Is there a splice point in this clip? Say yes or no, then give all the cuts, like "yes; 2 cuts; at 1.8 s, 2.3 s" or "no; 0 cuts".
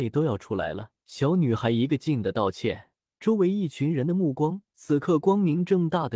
yes; 2 cuts; at 1.0 s, 3.1 s